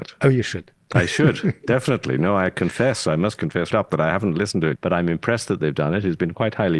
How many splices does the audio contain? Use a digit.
2